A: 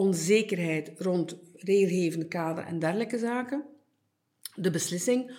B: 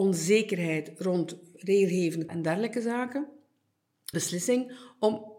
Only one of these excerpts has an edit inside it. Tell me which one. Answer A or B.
B